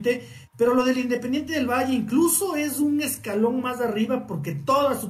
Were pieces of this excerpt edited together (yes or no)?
no